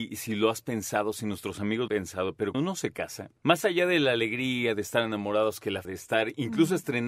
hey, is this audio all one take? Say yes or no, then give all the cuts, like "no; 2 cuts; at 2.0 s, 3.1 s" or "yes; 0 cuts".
no; 4 cuts; at 1.9 s, 2.5 s, 3.4 s, 5.8 s